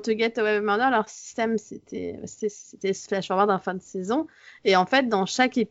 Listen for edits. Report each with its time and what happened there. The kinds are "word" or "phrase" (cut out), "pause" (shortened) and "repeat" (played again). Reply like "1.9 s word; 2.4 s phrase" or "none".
none